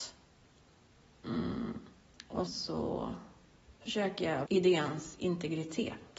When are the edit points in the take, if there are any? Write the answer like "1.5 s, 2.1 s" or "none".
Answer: 2.5 s, 3.8 s, 4.5 s